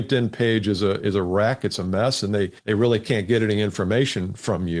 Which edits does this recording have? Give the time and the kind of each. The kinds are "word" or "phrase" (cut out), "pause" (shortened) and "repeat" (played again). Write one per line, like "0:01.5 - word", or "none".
0:02.6 - pause